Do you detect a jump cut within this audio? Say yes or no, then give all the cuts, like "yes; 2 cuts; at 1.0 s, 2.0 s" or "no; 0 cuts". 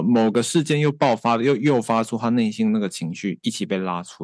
no; 0 cuts